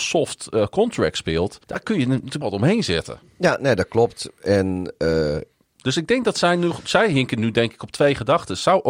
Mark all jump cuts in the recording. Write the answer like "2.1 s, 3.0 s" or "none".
1.6 s, 2.4 s